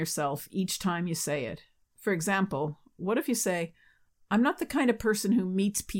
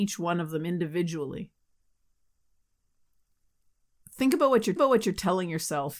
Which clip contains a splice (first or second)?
second